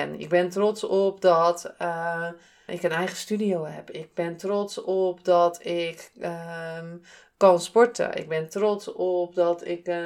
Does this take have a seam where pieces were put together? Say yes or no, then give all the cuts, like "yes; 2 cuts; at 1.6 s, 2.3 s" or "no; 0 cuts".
yes; 1 cut; at 2.7 s